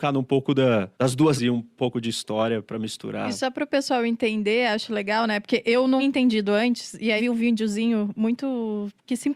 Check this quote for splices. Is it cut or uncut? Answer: cut